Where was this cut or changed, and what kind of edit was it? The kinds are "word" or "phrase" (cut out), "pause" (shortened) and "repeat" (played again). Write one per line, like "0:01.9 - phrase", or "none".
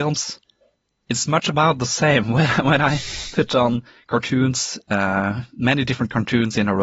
none